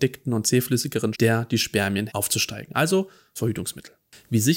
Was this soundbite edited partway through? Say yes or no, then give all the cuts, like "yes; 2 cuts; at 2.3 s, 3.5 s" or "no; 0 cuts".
yes; 3 cuts; at 1.1 s, 2.1 s, 3.4 s